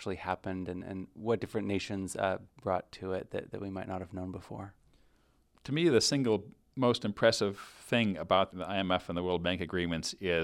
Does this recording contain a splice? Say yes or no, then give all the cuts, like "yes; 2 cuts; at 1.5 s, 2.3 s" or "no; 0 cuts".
no; 0 cuts